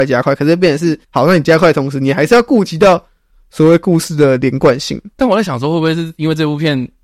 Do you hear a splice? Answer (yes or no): yes